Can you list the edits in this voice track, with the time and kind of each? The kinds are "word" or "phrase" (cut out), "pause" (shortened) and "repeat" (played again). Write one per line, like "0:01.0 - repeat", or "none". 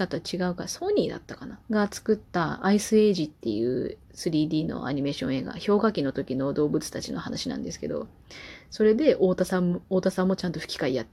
0:01.6 - pause
0:04.0 - pause